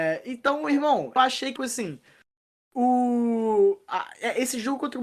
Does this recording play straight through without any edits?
no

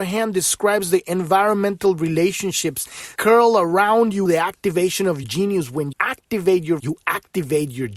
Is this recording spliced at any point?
yes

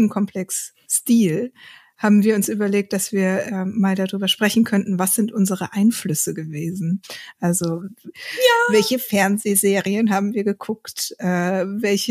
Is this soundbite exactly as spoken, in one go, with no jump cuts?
yes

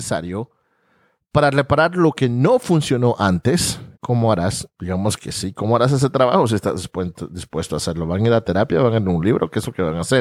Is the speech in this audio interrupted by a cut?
yes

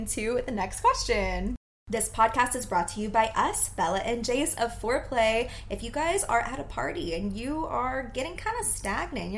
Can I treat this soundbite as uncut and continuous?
yes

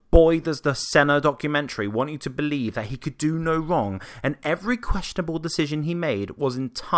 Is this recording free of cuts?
yes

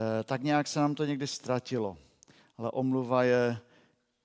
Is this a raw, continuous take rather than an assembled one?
yes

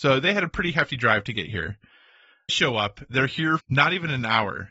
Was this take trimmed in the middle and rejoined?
yes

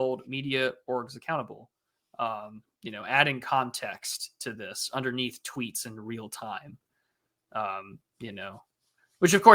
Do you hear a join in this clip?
no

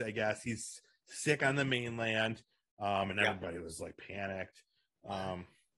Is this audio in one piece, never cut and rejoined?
yes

